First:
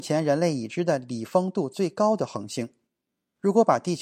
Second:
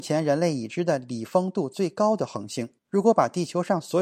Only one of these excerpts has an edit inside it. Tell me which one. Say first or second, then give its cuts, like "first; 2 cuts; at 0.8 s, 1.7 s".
second; 1 cut; at 2.8 s